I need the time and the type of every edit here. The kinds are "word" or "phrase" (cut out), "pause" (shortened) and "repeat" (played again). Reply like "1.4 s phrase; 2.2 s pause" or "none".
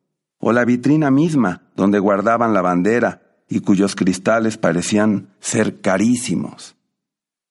none